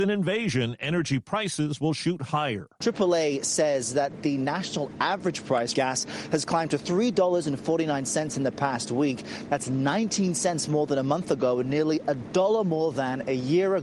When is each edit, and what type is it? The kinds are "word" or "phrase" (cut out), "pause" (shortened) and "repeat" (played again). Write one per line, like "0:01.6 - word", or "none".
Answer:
0:05.7 - phrase

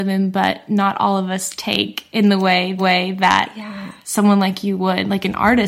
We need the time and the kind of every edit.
0:02.8 - repeat

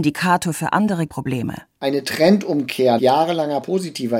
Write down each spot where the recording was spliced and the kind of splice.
0:01.1 - word
0:03.0 - word

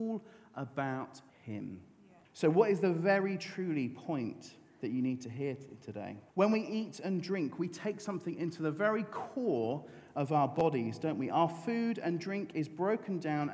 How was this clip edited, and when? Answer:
0:01.3 - pause
0:02.2 - pause
0:06.3 - pause

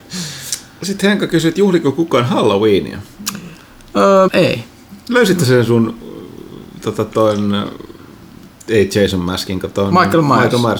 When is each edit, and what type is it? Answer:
0:04.3 - word

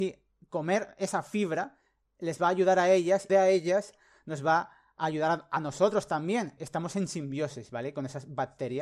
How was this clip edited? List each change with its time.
0:03.3 - phrase
0:06.6 - phrase

